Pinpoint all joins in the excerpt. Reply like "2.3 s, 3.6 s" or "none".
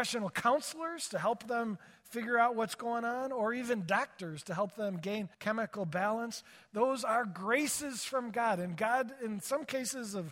5.3 s